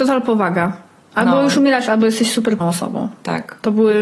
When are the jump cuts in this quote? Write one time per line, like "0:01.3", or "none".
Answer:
0:02.6